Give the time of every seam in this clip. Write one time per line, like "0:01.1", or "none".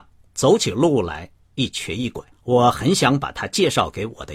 0:02.3